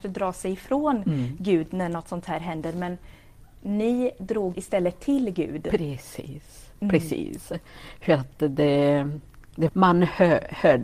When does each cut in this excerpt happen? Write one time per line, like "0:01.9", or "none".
0:04.5
0:06.7
0:09.7